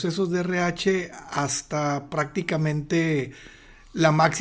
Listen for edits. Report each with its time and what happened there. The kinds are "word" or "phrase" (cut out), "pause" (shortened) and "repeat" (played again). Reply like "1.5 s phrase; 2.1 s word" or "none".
none